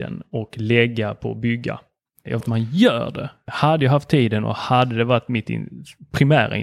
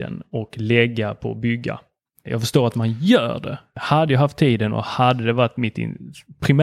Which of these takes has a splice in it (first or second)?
first